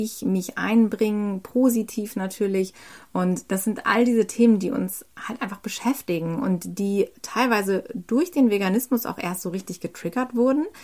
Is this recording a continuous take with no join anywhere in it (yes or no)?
yes